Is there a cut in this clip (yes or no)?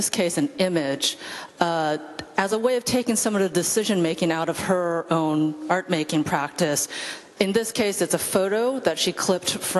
no